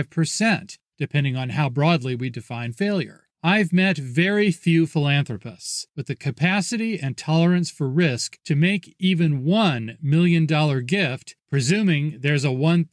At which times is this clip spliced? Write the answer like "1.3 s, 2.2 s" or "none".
3.3 s